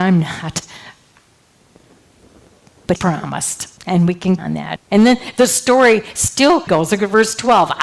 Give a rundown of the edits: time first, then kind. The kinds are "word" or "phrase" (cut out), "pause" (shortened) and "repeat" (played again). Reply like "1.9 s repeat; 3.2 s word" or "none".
3.0 s word; 3.8 s pause; 4.4 s word; 4.8 s word; 6.7 s word